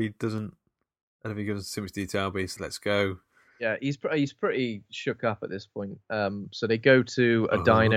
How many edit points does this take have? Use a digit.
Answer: 1